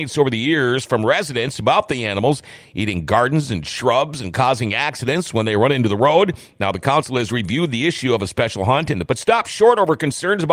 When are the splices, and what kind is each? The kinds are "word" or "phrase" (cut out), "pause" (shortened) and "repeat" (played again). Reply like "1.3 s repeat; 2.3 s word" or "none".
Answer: 9.1 s word